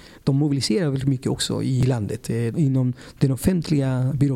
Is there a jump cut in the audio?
no; 0 cuts

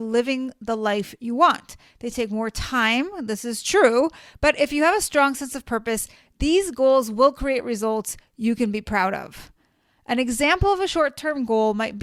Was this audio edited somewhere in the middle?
no; 0 cuts

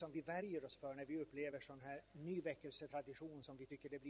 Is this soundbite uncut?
yes; 0 cuts

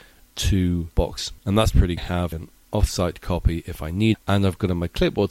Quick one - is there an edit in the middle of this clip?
yes; 4 cuts; at 1.4 s, 2.0 s, 2.3 s, 4.1 s

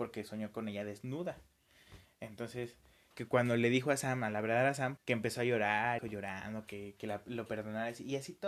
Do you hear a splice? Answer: yes; 3 cuts; at 3.1 s, 5.0 s, 6.0 s

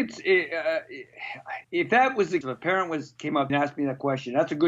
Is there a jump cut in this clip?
yes; 3 cuts; at 1.6 s, 2.4 s, 3.5 s

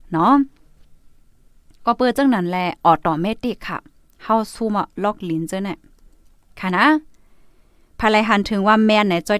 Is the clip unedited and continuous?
yes; 0 cuts

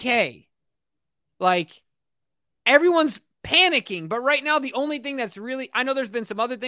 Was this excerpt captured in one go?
yes; 0 cuts

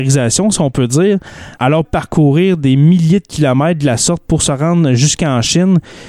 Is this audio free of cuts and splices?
no; 1 cut; at 1.8 s

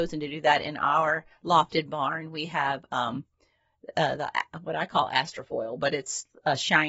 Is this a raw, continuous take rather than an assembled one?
yes; 0 cuts

